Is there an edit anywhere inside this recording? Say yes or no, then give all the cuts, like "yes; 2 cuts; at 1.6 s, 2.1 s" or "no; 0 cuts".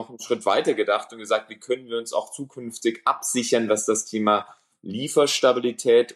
no; 0 cuts